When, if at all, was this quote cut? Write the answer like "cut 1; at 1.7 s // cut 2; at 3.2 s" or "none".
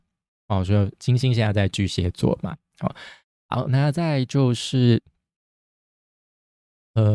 none